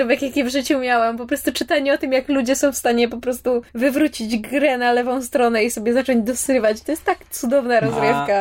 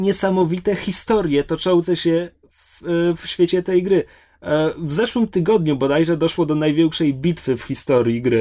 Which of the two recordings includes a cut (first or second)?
first